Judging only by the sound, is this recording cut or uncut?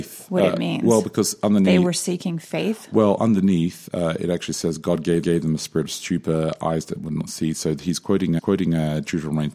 cut